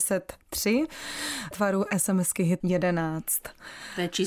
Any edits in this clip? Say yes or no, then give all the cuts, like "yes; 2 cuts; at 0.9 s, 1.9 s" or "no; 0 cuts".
yes; 2 cuts; at 1.5 s, 2.6 s